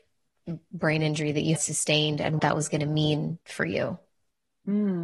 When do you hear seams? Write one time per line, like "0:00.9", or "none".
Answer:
0:01.6
0:02.4
0:03.4